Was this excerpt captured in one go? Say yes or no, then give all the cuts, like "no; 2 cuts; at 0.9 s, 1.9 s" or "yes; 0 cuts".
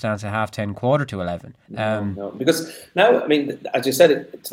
no; 1 cut; at 1.7 s